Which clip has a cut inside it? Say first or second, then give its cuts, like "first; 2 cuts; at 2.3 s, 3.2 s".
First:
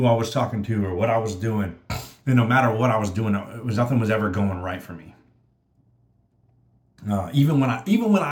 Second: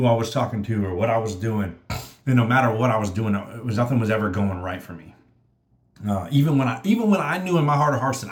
second; 1 cut; at 5.7 s